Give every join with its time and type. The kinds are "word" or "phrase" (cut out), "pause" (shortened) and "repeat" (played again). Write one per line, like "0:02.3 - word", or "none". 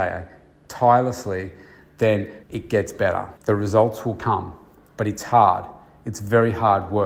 0:02.4 - pause
0:03.4 - pause